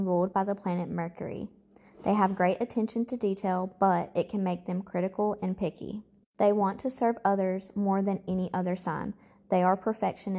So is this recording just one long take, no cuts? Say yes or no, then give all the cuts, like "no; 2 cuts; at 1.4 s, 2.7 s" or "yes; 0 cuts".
yes; 0 cuts